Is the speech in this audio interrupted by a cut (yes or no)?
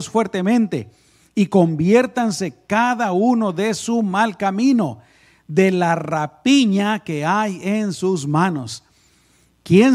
no